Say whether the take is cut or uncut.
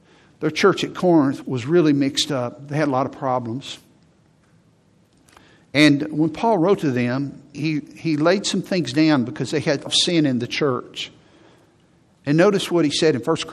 cut